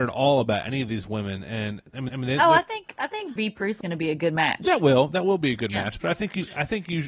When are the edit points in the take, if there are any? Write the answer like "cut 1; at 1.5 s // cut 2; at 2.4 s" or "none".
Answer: cut 1; at 2.1 s // cut 2; at 3.4 s // cut 3; at 3.8 s